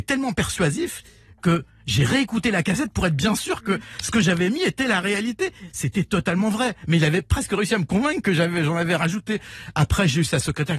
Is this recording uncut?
yes; 0 cuts

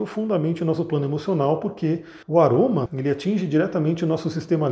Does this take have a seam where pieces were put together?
yes; 2 cuts; at 2.2 s, 2.9 s

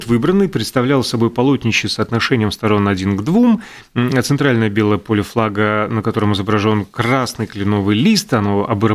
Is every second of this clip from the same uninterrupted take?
yes; 0 cuts

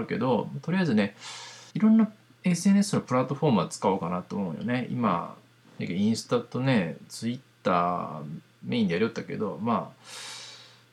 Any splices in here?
yes; 1 cut; at 1.7 s

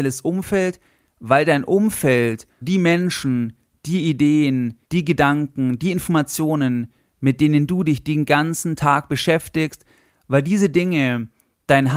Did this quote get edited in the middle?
yes; 2 cuts; at 2.6 s, 4.8 s

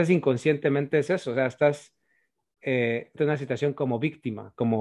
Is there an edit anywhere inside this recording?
yes; 1 cut; at 3.2 s

